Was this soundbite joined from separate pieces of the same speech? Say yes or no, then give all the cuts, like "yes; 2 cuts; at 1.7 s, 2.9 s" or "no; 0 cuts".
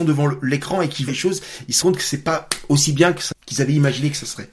yes; 3 cuts; at 1.1 s, 1.8 s, 3.3 s